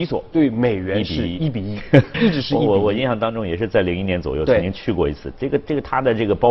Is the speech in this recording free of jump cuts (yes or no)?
no